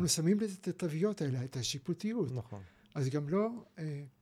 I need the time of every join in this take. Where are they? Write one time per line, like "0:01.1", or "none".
none